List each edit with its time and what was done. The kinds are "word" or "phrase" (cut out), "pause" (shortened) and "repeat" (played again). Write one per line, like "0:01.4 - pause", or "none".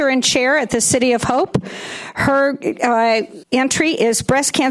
0:03.4 - word